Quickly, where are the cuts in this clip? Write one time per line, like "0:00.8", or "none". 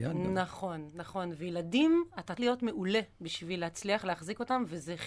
0:02.4